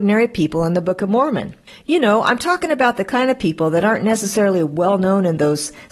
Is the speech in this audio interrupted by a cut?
no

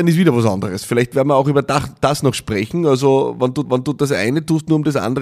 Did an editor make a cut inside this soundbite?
yes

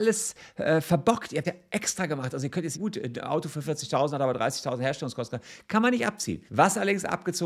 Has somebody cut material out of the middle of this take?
yes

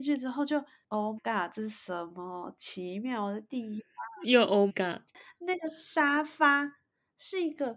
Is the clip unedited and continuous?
no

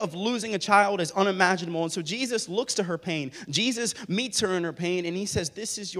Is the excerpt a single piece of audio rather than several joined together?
yes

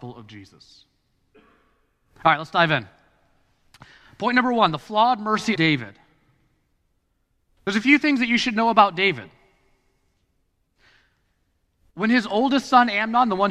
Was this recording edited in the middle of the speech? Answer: yes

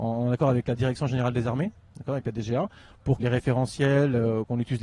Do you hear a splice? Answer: yes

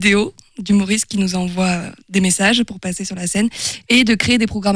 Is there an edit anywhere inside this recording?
no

